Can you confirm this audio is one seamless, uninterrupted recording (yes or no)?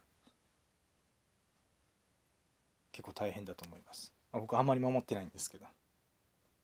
no